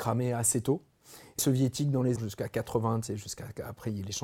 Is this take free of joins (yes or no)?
no